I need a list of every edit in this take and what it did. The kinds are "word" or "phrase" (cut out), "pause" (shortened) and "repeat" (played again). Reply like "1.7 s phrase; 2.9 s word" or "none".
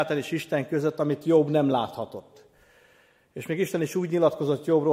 none